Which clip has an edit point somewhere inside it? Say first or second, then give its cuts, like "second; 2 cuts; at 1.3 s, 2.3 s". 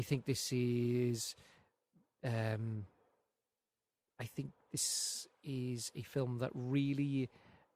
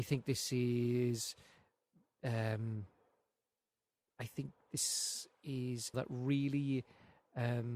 second; 1 cut; at 5.9 s